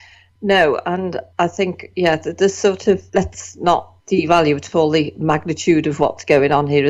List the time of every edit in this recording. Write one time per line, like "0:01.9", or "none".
0:01.3
0:03.1
0:04.0